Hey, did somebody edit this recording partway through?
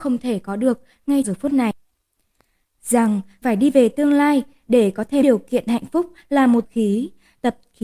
yes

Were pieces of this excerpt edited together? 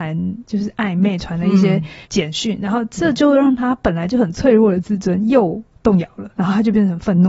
yes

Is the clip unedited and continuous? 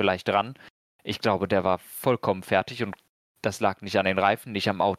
yes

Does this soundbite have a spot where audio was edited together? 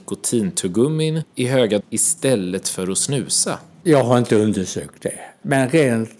yes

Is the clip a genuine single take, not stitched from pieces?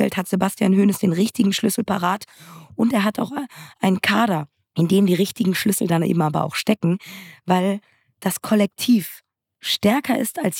yes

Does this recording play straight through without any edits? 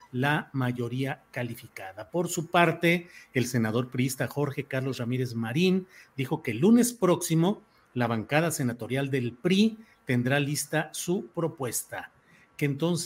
yes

